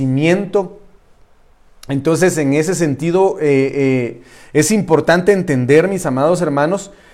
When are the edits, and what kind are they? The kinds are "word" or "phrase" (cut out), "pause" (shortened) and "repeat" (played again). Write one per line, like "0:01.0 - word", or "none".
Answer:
none

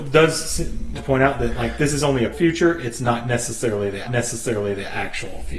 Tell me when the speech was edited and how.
0:00.9 - word
0:02.3 - word
0:04.0 - repeat

